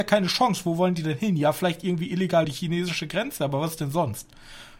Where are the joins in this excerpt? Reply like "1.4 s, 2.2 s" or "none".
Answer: 2.4 s